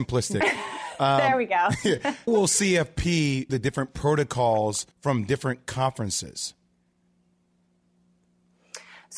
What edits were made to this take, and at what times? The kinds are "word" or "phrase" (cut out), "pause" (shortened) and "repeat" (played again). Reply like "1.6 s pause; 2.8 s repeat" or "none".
2.3 s word; 3.5 s word; 4.9 s pause